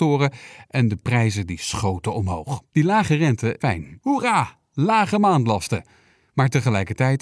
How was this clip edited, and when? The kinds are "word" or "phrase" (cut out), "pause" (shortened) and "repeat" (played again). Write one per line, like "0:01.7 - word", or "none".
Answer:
0:02.7 - pause
0:03.6 - phrase